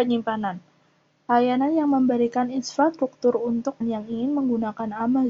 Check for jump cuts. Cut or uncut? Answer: cut